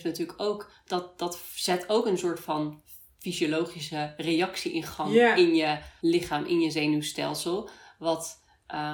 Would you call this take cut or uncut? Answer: cut